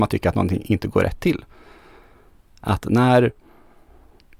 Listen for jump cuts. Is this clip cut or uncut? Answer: uncut